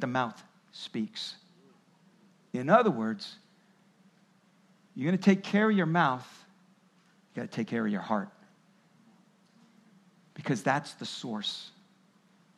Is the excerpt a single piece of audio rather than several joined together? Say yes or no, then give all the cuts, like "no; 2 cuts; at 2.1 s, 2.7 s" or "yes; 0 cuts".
yes; 0 cuts